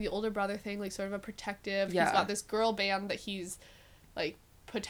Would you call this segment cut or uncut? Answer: uncut